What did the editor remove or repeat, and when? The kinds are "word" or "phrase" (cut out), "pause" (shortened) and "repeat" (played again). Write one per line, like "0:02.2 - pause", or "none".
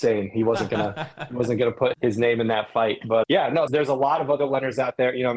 0:01.9 - word
0:03.2 - word
0:03.7 - word